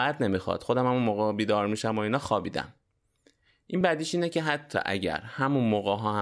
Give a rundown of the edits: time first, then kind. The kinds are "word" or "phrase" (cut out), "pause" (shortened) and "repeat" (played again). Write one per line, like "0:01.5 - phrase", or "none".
none